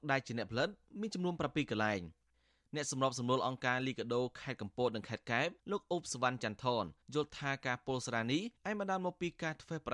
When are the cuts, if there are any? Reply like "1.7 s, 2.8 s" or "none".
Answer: 5.6 s, 7.0 s, 8.6 s